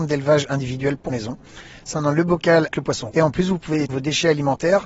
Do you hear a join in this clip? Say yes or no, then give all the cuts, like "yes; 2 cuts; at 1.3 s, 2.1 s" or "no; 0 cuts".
yes; 5 cuts; at 1.1 s, 1.9 s, 2.7 s, 3.1 s, 3.9 s